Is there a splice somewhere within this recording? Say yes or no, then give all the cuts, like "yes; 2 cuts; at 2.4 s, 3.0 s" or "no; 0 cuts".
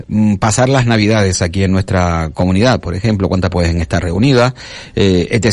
yes; 1 cut; at 3.5 s